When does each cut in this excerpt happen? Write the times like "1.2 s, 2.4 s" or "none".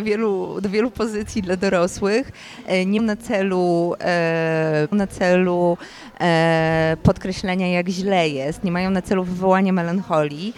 3.0 s, 4.9 s